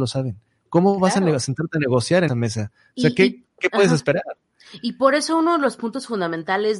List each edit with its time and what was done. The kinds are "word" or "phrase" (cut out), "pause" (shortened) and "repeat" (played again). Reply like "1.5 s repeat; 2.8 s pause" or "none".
2.3 s word